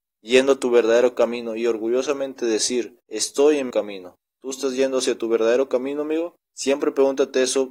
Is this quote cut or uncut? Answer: cut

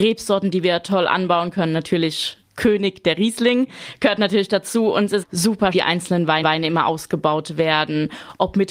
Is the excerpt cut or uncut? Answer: cut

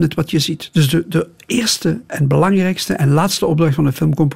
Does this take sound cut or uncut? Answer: uncut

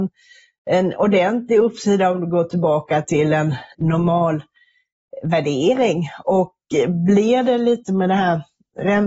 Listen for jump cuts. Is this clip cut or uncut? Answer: cut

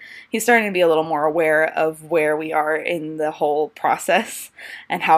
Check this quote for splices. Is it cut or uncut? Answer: uncut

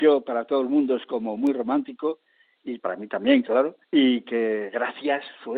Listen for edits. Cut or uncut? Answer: cut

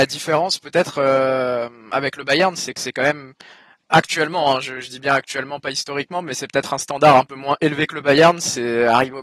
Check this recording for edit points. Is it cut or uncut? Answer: uncut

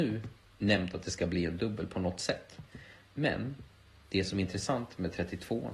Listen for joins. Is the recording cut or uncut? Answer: uncut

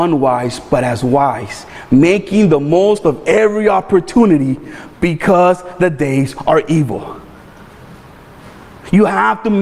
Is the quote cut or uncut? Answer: uncut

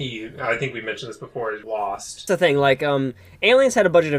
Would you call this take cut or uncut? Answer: cut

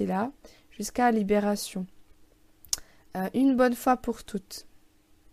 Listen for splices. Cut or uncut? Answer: uncut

